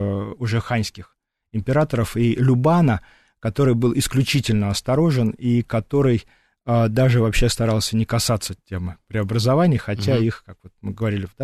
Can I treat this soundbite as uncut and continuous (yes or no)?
yes